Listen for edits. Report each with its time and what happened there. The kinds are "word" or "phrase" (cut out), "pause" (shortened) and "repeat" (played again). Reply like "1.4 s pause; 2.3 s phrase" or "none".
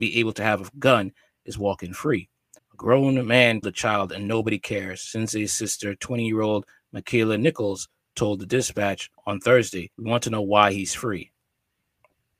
2.6 s pause; 3.6 s word; 9.1 s pause; 9.9 s pause